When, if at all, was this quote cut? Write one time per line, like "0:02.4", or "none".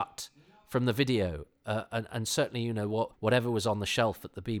0:03.1